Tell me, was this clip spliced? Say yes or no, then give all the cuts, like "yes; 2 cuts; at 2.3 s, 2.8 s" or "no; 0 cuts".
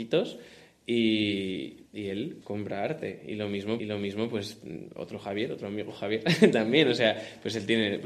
yes; 3 cuts; at 1.9 s, 2.4 s, 3.8 s